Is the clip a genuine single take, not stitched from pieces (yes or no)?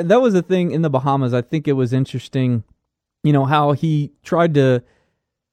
yes